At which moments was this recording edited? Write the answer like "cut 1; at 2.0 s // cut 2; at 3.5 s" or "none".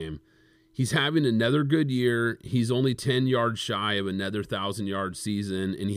none